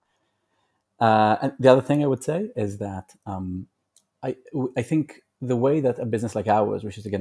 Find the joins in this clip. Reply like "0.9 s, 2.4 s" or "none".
none